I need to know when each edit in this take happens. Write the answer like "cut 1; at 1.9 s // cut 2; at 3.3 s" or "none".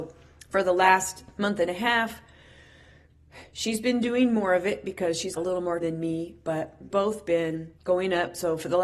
cut 1; at 5.4 s // cut 2; at 5.8 s // cut 3; at 6.9 s // cut 4; at 7.8 s